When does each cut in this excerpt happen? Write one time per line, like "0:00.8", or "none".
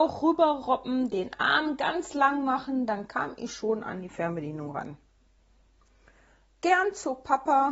none